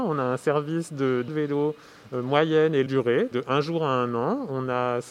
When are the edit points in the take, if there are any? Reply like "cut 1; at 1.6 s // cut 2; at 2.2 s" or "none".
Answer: cut 1; at 1.3 s // cut 2; at 2.9 s // cut 3; at 3.3 s